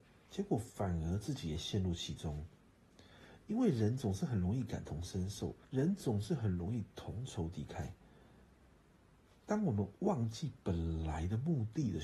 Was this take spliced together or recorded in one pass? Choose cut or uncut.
cut